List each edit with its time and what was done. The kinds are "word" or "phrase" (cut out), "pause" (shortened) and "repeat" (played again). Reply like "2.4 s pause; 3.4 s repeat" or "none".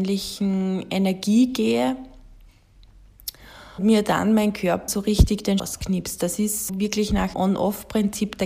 3.8 s word; 4.9 s word; 5.6 s word; 6.7 s word; 7.3 s word